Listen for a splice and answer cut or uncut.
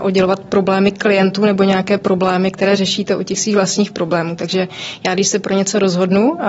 uncut